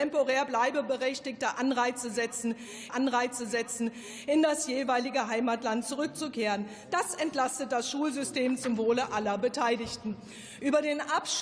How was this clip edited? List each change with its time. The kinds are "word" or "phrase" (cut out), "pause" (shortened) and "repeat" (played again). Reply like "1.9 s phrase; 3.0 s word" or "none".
2.9 s repeat